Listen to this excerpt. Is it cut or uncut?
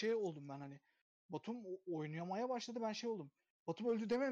uncut